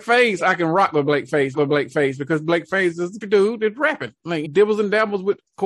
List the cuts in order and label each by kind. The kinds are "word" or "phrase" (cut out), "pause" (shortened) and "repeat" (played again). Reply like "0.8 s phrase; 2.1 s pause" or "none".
1.5 s repeat; 3.2 s word; 4.4 s phrase